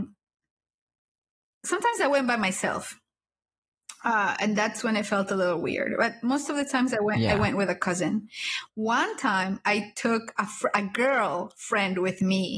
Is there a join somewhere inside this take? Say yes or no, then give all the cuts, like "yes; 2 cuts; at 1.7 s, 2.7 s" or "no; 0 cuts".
no; 0 cuts